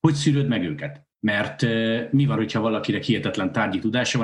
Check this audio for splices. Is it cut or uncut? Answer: cut